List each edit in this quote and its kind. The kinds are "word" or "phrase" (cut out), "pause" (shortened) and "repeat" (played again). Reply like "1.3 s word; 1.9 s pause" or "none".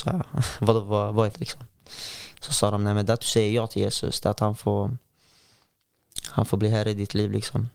1.3 s word